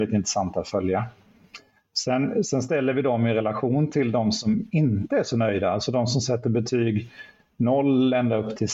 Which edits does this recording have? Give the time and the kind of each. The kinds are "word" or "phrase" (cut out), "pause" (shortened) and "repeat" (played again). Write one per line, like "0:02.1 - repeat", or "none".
none